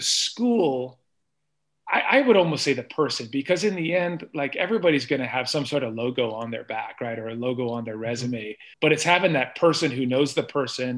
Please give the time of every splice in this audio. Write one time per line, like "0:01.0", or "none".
0:08.7